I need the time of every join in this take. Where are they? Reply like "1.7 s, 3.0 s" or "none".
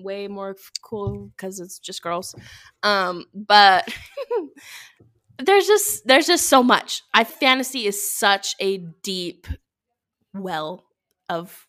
7.3 s